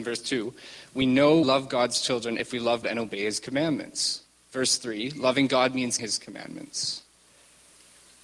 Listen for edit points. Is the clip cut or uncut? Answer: cut